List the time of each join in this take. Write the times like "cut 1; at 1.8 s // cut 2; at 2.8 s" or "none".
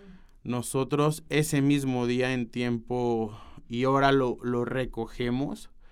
cut 1; at 3.6 s